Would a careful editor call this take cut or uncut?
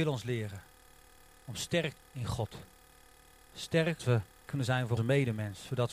cut